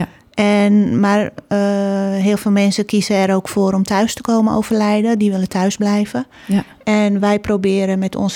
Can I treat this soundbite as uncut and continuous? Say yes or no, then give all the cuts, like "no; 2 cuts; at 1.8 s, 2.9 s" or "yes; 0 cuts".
yes; 0 cuts